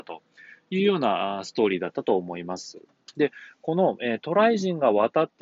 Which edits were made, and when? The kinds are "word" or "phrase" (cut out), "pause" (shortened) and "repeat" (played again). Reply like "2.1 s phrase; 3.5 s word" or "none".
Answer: none